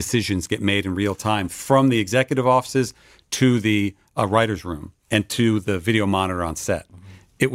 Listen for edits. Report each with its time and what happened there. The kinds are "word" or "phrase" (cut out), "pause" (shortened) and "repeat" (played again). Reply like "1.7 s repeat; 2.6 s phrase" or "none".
none